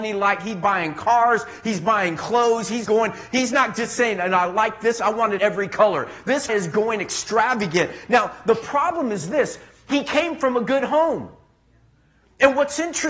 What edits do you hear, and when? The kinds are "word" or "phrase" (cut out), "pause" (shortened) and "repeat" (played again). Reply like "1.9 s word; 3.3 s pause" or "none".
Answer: 2.8 s word; 5.4 s word; 6.5 s word